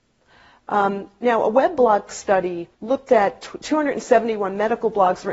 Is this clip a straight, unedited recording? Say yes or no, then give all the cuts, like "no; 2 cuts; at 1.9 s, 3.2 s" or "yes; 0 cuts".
no; 1 cut; at 2.7 s